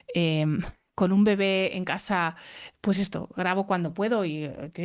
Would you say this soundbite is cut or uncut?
uncut